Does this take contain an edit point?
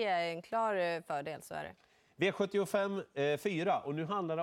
no; 0 cuts

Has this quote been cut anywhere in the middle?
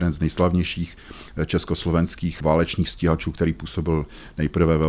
no; 0 cuts

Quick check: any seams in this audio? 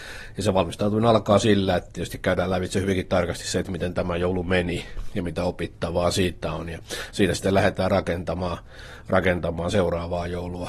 no; 0 cuts

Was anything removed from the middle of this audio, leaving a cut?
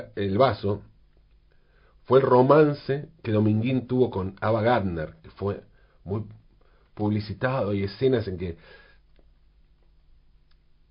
no; 0 cuts

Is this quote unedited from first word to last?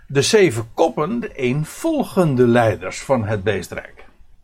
no; 1 cut; at 1.2 s

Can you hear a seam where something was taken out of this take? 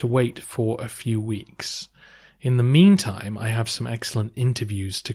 no; 0 cuts

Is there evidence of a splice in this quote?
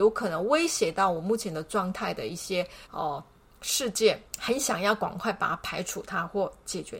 yes; 2 cuts; at 2.8 s, 4.3 s

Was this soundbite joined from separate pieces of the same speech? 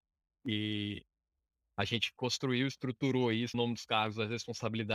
yes; 1 cut; at 3.5 s

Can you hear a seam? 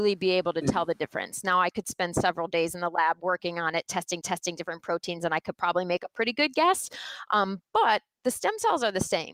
yes; 1 cut; at 4.2 s

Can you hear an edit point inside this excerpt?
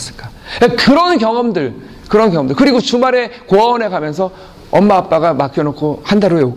no; 0 cuts

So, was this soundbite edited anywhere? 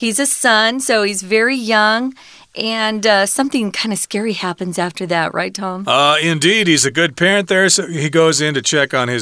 no; 0 cuts

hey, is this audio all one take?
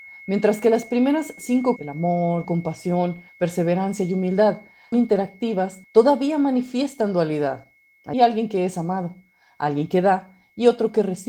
no; 6 cuts; at 1.8 s, 2.4 s, 3.3 s, 4.9 s, 5.8 s, 8.1 s

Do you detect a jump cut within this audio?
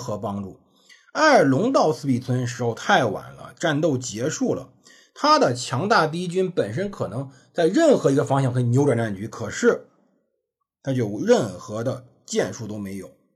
no; 0 cuts

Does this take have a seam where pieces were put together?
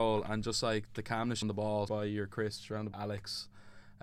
yes; 3 cuts; at 1.4 s, 1.9 s, 2.9 s

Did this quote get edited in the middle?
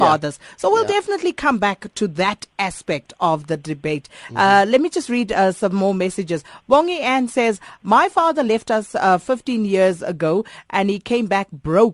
no; 0 cuts

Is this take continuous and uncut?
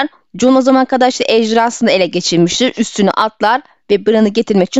yes; 0 cuts

